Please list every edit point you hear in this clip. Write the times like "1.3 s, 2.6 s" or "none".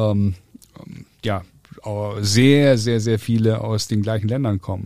none